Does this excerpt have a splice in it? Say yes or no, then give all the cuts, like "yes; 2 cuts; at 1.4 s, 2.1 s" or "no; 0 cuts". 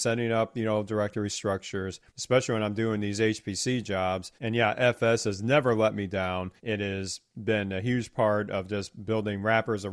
yes; 3 cuts; at 2.1 s, 4.4 s, 6.6 s